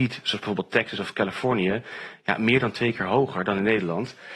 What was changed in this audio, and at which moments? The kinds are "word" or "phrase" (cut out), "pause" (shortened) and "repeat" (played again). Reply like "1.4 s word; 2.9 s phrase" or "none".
none

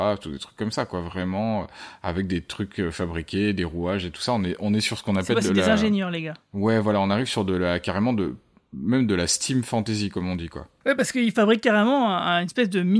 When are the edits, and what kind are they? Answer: none

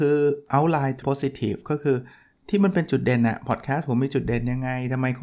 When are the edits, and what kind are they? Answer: 1.0 s word

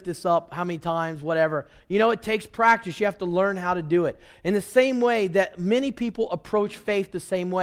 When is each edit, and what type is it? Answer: none

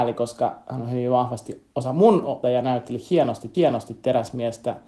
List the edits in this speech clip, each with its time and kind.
2.4 s word; 3.5 s repeat

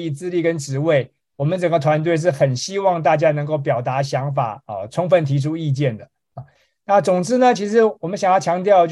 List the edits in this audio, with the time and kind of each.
none

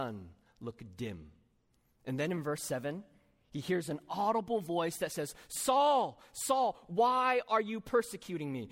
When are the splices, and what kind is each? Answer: none

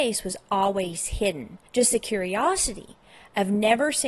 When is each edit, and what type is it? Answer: 1.7 s pause

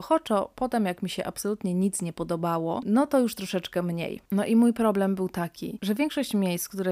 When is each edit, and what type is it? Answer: none

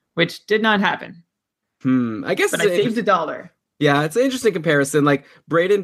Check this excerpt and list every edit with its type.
none

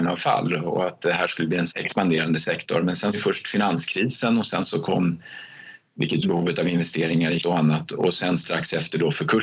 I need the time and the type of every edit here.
1.7 s word; 3.1 s phrase; 6.2 s phrase; 7.4 s word

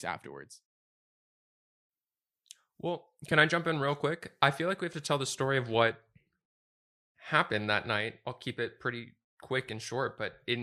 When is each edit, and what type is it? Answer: none

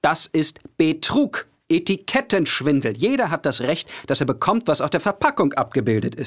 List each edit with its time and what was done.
none

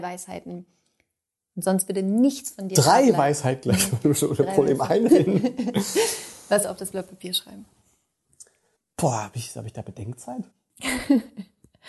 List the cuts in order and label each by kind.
5.1 s word; 6.6 s word; 8.8 s pause; 10.5 s pause

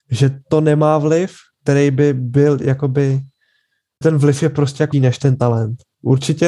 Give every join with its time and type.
4.0 s word; 4.9 s word

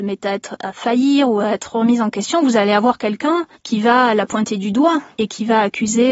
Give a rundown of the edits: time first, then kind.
3.6 s pause

